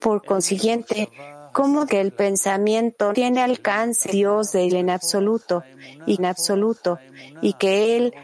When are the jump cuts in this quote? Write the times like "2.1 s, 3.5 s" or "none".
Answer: 1.9 s, 3.1 s, 4.1 s, 4.7 s, 6.2 s